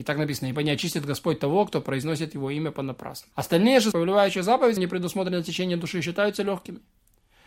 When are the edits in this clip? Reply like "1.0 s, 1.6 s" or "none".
3.3 s, 3.9 s, 4.8 s

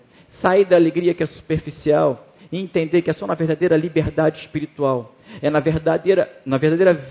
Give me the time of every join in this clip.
none

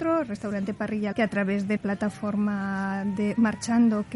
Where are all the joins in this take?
1.1 s, 1.8 s

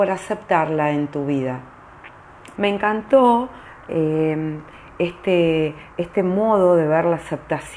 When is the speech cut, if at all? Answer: 2.6 s

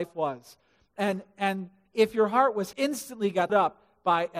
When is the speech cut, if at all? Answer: 2.7 s, 3.5 s

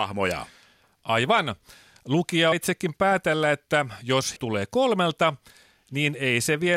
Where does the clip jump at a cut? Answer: 2.5 s, 4.4 s

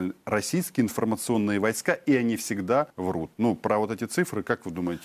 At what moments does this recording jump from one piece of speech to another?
2.9 s

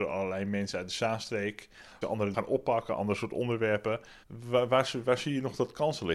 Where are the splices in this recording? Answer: 2.0 s, 2.3 s, 4.2 s

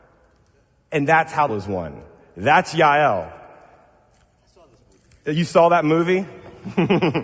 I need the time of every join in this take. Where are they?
1.5 s

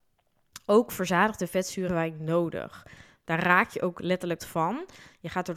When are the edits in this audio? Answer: 1.9 s, 4.4 s

